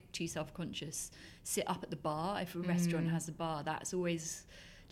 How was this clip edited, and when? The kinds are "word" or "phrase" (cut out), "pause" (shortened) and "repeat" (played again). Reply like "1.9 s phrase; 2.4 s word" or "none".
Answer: none